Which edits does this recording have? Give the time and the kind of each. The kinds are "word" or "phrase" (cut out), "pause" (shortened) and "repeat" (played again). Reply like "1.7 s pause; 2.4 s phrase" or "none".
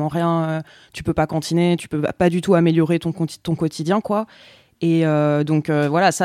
none